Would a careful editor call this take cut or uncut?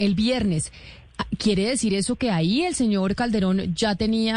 uncut